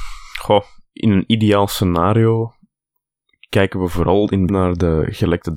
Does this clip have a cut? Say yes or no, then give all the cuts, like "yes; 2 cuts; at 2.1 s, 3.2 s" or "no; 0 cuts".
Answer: yes; 1 cut; at 4.5 s